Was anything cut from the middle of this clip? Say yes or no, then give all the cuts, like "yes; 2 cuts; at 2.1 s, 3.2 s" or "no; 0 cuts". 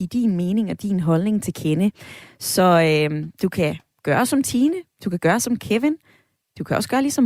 no; 0 cuts